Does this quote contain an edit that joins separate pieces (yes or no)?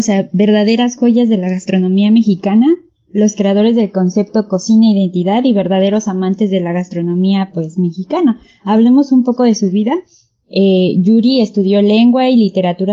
no